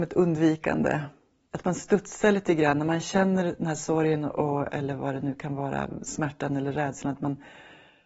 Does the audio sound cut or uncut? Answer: uncut